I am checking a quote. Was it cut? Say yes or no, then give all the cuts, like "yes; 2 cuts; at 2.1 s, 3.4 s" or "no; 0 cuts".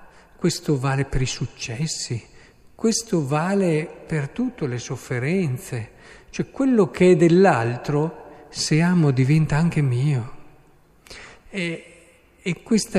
no; 0 cuts